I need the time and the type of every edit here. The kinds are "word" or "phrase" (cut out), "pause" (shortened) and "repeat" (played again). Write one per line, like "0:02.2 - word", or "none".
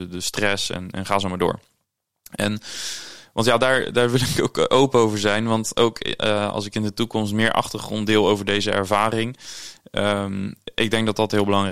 none